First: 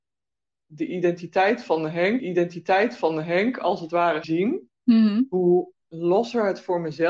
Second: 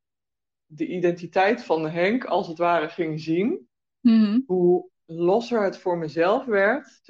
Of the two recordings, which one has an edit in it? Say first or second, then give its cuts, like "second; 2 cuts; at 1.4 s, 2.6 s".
first; 3 cuts; at 2.2 s, 4.2 s, 4.8 s